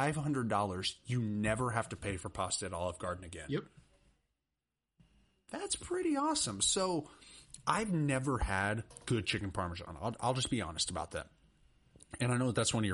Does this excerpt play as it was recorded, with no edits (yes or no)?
yes